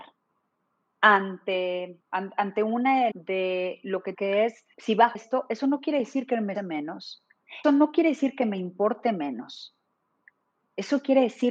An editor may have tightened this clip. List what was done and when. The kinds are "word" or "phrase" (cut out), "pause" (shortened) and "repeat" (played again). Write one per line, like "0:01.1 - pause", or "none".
0:02.0 - pause
0:03.1 - word
0:04.1 - phrase
0:04.7 - pause
0:05.1 - phrase
0:06.5 - word
0:07.6 - word